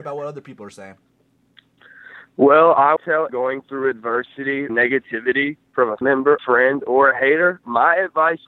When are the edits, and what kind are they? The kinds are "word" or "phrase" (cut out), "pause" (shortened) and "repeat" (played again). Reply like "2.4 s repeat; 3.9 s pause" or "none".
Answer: 3.0 s word; 3.3 s word; 4.7 s word; 6.0 s word; 6.4 s word